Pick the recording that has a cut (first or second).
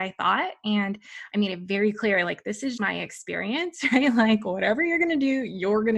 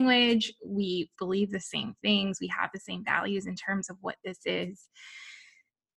first